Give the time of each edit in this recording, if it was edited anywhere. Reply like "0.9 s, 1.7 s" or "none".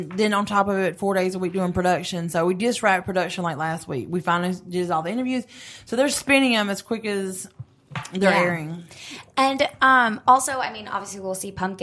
none